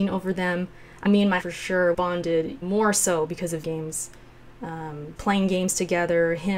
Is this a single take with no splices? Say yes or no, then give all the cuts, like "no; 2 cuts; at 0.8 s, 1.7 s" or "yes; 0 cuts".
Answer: no; 6 cuts; at 1.0 s, 1.4 s, 1.9 s, 2.6 s, 3.6 s, 5.2 s